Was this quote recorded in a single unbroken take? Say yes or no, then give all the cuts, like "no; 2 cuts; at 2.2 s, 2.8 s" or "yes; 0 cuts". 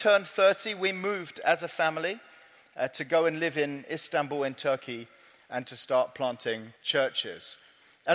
no; 1 cut; at 6.8 s